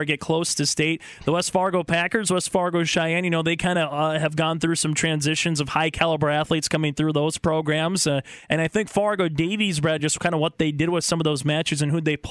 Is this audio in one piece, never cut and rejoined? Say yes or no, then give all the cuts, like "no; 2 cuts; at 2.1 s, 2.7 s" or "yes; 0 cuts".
yes; 0 cuts